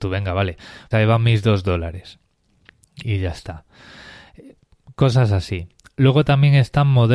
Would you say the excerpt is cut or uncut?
cut